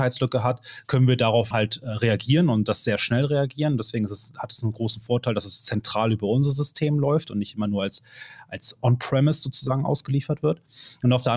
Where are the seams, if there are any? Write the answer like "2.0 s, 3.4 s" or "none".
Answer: 1.5 s